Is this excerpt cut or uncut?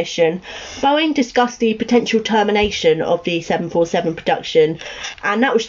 uncut